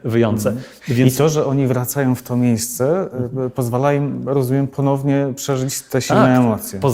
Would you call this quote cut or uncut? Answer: uncut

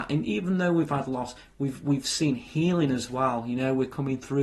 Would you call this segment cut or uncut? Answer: uncut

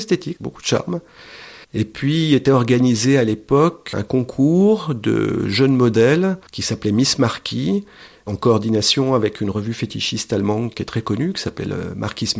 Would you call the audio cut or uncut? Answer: cut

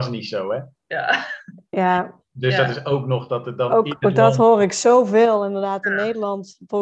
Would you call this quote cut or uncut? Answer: uncut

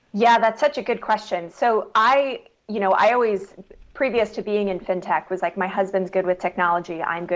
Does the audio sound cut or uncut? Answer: cut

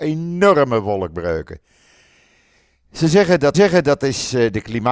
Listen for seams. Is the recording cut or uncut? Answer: cut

